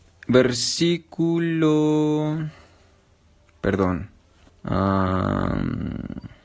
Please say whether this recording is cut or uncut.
cut